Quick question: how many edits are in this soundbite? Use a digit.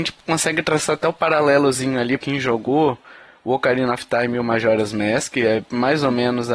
1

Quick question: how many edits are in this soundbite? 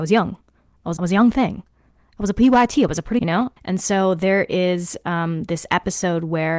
3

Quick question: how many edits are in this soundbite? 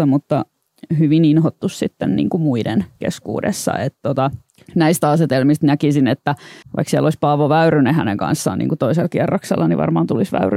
2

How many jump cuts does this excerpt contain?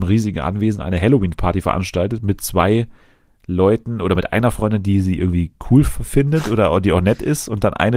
0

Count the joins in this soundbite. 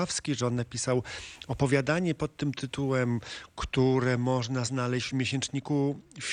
0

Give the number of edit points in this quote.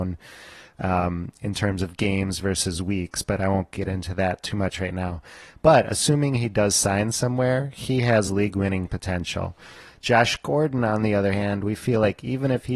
0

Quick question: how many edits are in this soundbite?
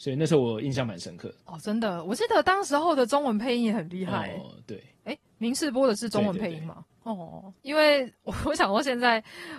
0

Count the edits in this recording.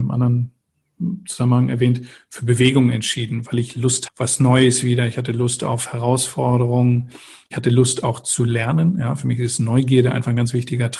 1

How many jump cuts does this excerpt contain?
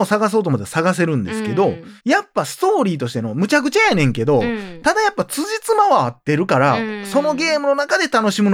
1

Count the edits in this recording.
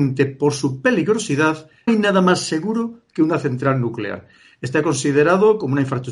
1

